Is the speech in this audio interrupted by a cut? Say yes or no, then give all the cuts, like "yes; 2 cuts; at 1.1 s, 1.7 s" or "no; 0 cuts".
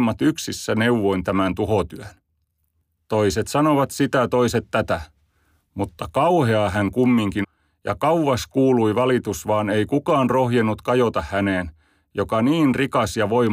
yes; 1 cut; at 7.4 s